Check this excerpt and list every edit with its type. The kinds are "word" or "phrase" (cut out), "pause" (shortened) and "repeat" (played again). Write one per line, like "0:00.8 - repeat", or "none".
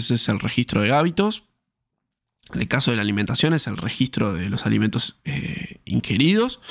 none